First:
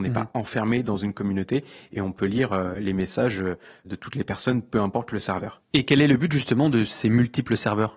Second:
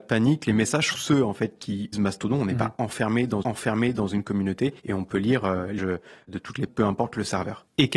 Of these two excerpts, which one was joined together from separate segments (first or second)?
second